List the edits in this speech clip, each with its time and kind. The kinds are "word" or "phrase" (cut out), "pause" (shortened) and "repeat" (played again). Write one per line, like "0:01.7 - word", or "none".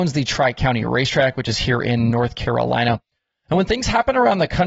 none